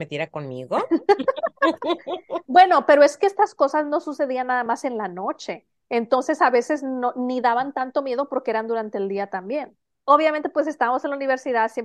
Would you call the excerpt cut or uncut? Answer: uncut